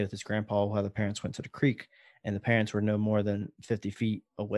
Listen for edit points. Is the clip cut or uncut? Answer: uncut